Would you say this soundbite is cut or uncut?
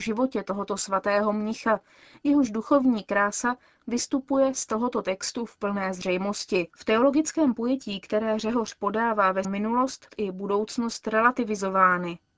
cut